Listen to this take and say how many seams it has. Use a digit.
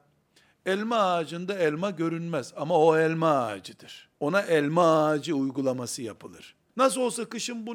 2